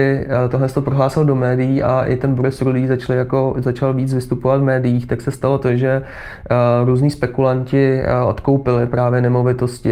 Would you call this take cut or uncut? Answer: uncut